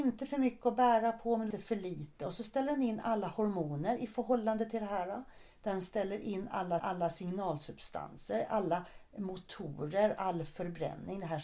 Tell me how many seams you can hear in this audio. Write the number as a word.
two